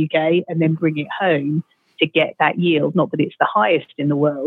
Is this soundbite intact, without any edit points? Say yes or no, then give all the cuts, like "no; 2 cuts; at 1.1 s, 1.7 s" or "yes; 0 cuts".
yes; 0 cuts